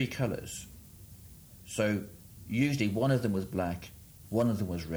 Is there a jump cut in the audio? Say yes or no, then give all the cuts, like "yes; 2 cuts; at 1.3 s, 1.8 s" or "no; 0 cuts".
no; 0 cuts